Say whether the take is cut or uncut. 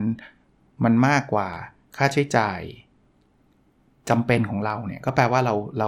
cut